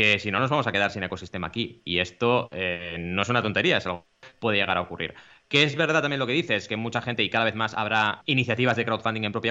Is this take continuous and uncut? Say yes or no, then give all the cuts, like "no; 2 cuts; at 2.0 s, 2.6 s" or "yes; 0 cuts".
no; 1 cut; at 8.2 s